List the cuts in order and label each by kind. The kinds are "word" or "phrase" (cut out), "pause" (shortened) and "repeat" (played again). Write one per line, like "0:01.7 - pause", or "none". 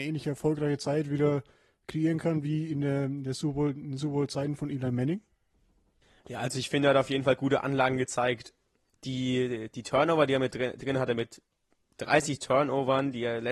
none